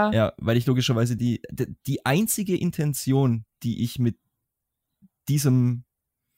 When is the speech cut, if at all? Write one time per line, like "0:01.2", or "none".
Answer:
none